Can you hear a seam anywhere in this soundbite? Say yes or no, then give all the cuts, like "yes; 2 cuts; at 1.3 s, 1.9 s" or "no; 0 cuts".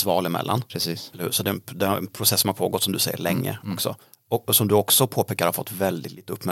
no; 0 cuts